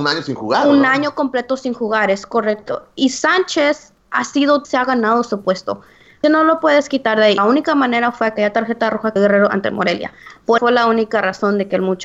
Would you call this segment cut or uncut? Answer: cut